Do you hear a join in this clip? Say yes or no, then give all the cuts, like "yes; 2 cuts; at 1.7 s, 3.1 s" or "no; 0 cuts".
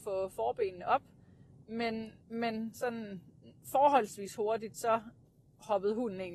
yes; 1 cut; at 2.2 s